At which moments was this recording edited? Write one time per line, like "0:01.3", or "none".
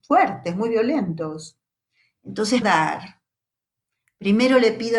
0:02.6